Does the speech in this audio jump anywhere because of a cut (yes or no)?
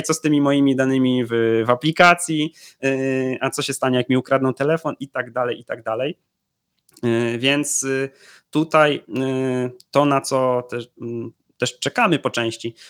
no